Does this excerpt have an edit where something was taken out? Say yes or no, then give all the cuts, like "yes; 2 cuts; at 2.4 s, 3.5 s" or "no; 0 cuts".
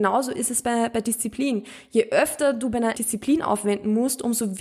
yes; 1 cut; at 2.9 s